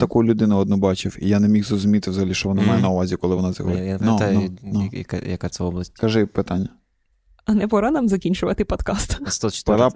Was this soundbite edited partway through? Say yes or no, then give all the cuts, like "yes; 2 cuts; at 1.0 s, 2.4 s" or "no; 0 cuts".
no; 0 cuts